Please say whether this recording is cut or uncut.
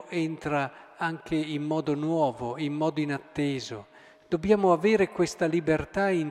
uncut